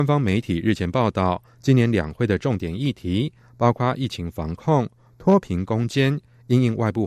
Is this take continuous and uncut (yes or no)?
yes